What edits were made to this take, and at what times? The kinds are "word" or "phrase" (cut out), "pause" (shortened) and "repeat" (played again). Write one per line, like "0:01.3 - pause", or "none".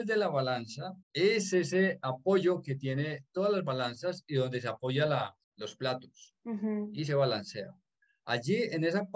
0:01.0 - pause
0:05.4 - pause
0:06.4 - pause